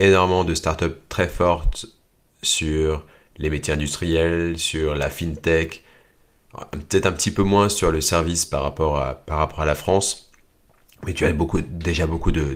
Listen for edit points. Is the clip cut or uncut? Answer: uncut